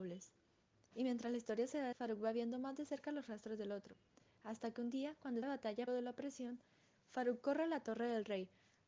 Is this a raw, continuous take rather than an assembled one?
no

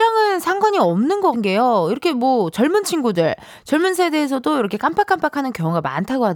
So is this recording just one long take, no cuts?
no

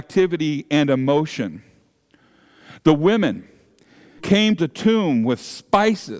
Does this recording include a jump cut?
yes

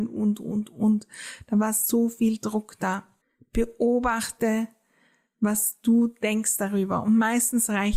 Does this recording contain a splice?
yes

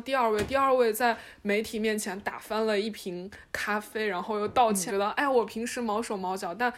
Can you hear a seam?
yes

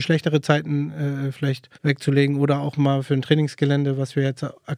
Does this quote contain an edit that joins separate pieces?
yes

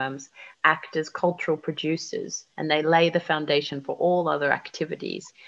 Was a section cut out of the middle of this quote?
yes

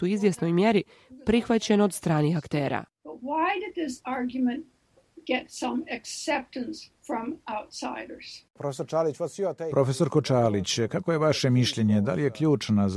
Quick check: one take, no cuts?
no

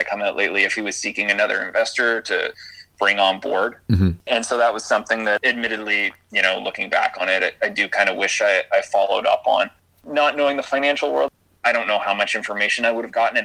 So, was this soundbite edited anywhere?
no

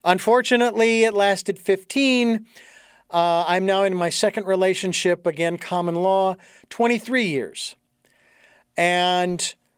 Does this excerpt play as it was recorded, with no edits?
yes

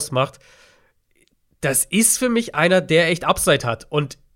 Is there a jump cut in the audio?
no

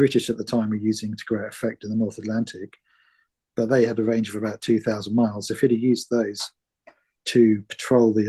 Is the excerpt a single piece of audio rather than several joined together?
yes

